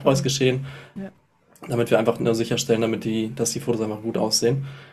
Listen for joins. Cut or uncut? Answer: cut